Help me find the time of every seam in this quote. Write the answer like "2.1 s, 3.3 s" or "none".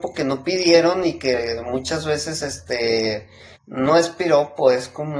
3.6 s